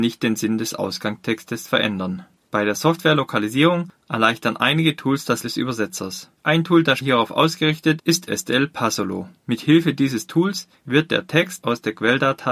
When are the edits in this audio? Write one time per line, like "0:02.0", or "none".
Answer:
0:02.4
0:05.4
0:06.4
0:07.0
0:08.0
0:09.4